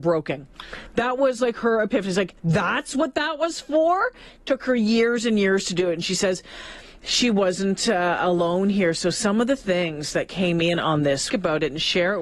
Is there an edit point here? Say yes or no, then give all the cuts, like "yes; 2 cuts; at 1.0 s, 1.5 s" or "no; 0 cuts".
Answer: yes; 2 cuts; at 2.4 s, 11.3 s